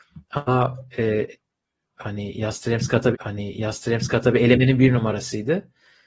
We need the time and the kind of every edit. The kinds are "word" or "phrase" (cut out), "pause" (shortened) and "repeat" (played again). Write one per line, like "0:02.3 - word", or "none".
0:03.1 - repeat